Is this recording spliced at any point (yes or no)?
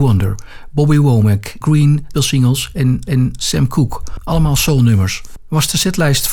yes